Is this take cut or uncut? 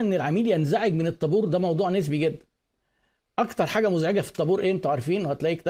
uncut